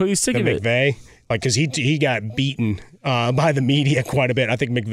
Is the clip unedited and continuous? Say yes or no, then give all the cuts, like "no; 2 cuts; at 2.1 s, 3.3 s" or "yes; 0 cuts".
yes; 0 cuts